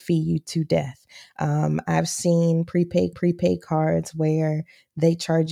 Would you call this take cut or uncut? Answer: cut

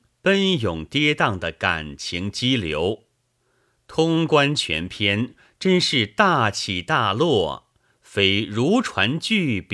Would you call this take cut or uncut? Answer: uncut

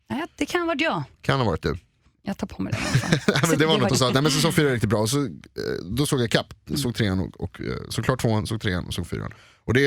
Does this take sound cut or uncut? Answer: cut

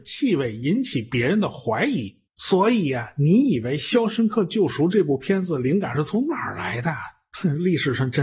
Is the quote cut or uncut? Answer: cut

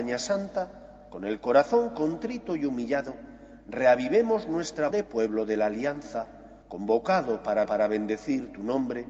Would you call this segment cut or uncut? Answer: cut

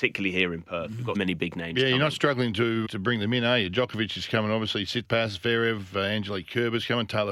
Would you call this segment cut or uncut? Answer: cut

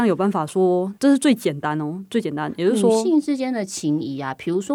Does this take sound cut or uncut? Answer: cut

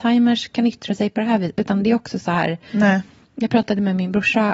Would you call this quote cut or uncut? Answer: uncut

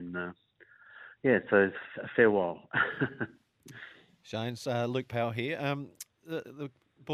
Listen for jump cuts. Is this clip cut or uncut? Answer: uncut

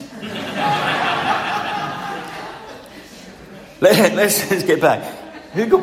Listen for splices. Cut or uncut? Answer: uncut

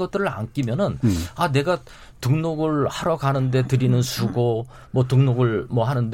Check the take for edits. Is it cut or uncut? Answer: uncut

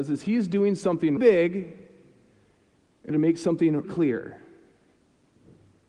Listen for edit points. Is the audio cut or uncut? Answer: cut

